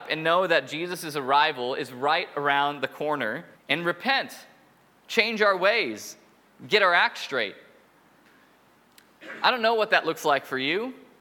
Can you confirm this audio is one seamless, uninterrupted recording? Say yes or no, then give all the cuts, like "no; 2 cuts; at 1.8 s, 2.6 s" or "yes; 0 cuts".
no; 1 cut; at 3.5 s